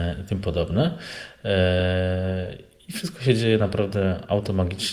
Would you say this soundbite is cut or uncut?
uncut